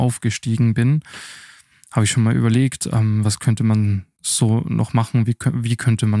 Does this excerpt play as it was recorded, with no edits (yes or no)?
yes